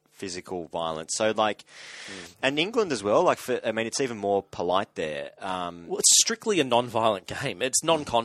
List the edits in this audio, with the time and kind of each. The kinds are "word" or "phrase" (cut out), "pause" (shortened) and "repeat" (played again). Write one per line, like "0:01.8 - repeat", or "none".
none